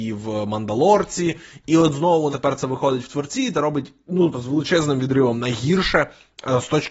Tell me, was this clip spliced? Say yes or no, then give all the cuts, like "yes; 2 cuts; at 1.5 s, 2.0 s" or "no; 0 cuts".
yes; 3 cuts; at 2.3 s, 3.5 s, 4.3 s